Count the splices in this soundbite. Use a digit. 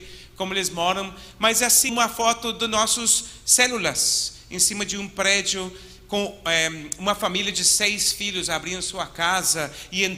1